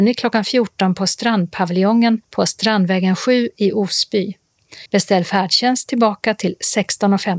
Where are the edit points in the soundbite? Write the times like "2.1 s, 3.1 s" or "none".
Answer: 2.2 s, 4.9 s